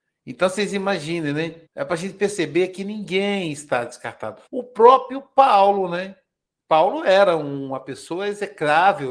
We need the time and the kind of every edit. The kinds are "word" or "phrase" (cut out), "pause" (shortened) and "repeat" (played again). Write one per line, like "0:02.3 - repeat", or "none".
0:01.7 - pause
0:04.5 - pause
0:06.4 - pause